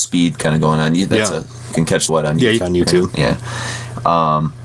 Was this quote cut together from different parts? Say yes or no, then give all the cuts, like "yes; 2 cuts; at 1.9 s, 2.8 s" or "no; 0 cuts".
yes; 3 cuts; at 1.7 s, 2.1 s, 2.6 s